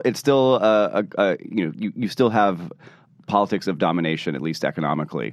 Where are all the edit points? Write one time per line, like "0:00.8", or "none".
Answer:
none